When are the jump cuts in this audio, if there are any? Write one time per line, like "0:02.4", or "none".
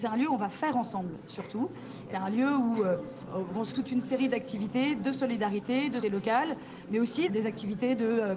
0:02.1
0:03.7
0:06.0
0:07.3